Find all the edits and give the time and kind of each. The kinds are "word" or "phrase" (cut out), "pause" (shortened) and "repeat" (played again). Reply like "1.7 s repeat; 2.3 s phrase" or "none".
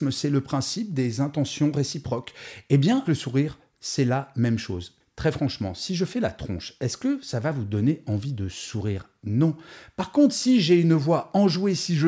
3.0 s word

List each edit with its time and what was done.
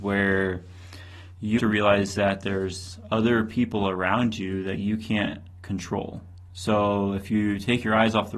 1.6 s word

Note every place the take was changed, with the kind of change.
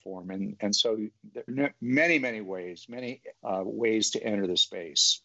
1.5 s word; 3.3 s word

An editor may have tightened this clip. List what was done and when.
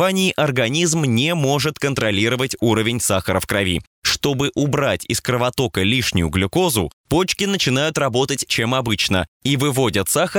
8.5 s word

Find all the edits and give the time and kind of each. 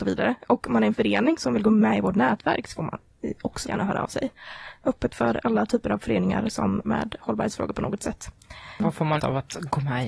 3.6 s word; 6.8 s word; 9.2 s word

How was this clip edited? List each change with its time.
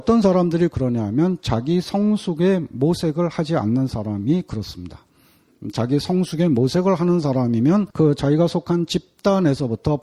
7.9 s pause

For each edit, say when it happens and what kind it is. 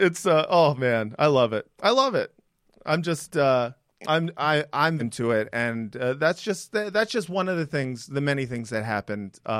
5.0 s word

